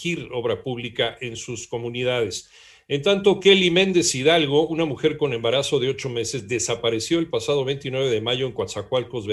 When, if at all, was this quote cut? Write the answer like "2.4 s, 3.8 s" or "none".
none